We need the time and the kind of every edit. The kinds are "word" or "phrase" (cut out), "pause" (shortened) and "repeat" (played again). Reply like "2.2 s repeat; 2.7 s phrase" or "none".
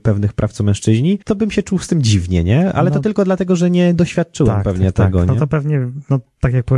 1.2 s pause